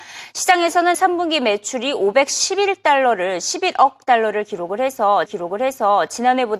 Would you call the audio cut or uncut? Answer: cut